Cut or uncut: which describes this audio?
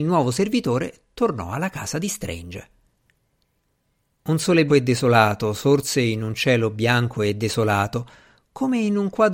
cut